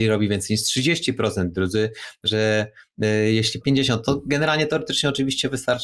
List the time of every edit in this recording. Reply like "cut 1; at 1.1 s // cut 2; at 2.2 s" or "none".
cut 1; at 3.6 s